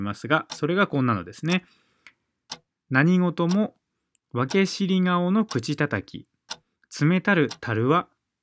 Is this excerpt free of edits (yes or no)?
yes